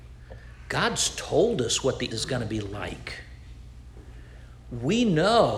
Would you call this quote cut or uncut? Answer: cut